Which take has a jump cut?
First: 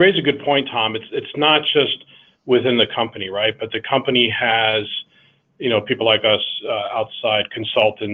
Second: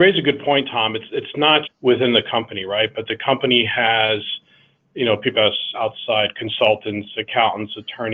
second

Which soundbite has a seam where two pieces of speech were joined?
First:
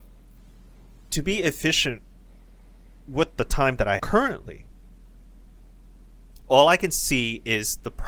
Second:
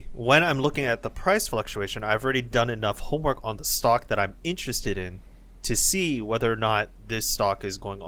first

